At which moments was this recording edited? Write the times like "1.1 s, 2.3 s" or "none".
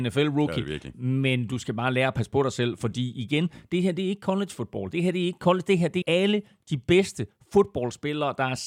6.0 s